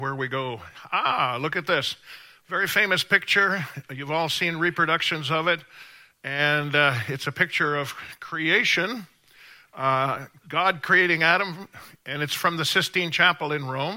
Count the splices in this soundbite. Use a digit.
0